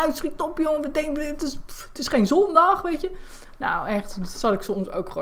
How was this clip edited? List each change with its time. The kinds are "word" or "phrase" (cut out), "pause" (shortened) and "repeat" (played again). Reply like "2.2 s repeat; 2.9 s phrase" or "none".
none

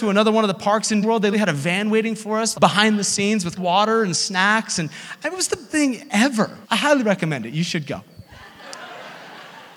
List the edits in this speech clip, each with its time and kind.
1.0 s word; 1.3 s word; 2.5 s word; 3.6 s word; 5.7 s word; 6.6 s pause

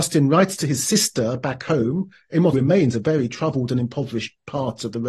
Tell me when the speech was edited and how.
2.5 s word

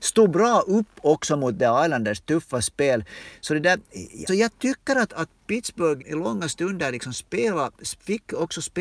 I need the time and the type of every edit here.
4.3 s word; 5.1 s word; 6.0 s word

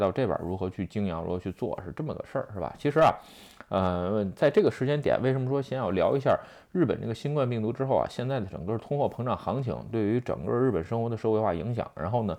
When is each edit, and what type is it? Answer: none

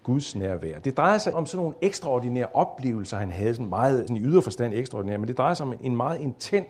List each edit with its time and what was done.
1.3 s word; 4.1 s word

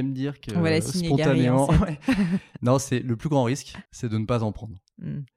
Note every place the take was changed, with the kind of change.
3.9 s pause

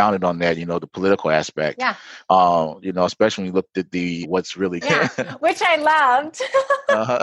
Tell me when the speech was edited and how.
4.2 s phrase; 4.8 s word

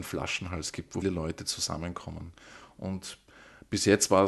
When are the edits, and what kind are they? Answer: 1.0 s word

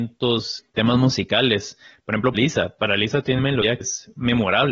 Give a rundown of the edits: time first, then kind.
2.3 s word; 3.4 s word; 3.8 s word

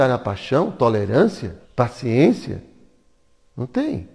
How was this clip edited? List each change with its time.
1.7 s pause

